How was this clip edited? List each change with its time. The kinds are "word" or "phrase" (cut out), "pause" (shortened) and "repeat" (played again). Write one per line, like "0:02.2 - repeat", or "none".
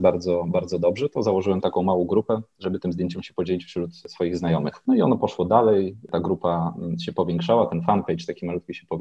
none